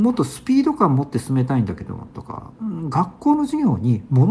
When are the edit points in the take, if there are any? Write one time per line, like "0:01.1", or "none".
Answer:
0:02.5